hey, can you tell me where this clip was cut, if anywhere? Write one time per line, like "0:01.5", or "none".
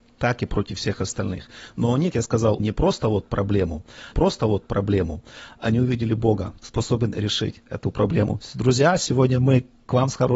0:02.1
0:02.6
0:04.1
0:06.6